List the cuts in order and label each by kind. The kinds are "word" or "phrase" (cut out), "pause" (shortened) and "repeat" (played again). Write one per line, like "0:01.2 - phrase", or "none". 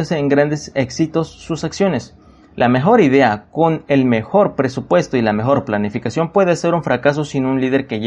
none